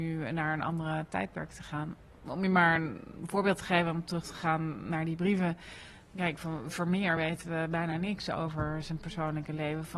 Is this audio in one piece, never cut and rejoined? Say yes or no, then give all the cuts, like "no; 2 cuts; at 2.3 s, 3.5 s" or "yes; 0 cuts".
yes; 0 cuts